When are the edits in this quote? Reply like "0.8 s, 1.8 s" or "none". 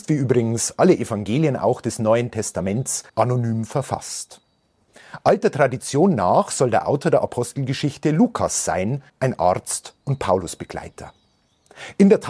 3.1 s, 9.1 s, 10.0 s